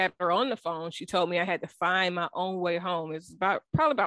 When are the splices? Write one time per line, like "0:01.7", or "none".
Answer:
none